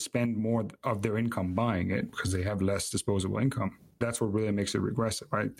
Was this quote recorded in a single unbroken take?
yes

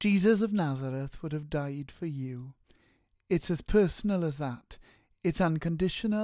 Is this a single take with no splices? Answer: yes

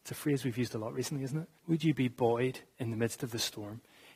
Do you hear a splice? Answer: yes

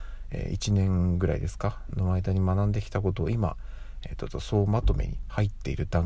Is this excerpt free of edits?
yes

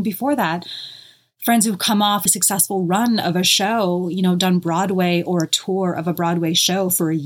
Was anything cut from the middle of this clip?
yes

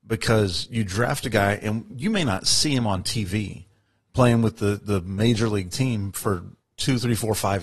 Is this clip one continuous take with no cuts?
yes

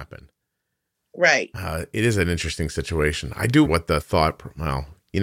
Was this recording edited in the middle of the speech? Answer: yes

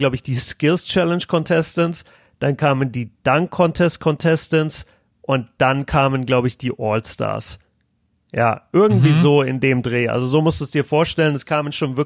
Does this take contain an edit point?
no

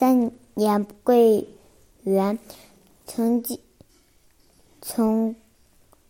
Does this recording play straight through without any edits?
yes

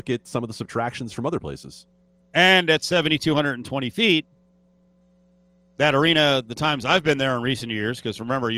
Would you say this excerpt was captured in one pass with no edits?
yes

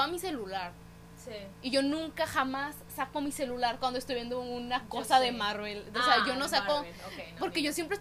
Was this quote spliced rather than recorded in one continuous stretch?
no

